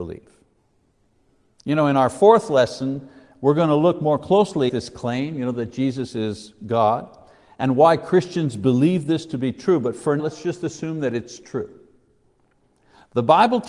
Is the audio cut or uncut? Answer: cut